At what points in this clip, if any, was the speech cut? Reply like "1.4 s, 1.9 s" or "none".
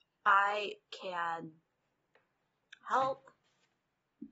none